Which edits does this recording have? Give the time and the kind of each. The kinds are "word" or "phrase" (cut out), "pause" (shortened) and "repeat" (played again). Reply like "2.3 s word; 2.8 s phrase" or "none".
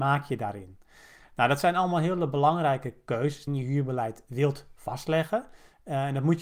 3.5 s phrase